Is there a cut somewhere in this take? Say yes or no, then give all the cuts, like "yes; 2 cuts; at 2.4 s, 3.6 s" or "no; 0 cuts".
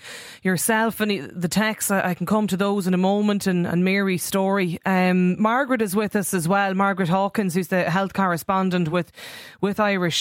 no; 0 cuts